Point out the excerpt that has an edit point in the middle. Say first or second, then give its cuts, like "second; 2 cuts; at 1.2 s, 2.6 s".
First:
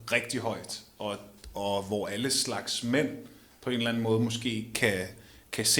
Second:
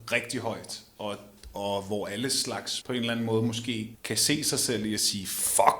second; 2 cuts; at 2.8 s, 3.9 s